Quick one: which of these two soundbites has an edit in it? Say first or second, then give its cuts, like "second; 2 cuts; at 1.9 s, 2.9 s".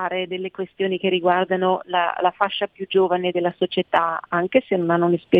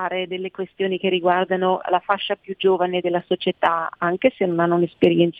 second; 1 cut; at 1.8 s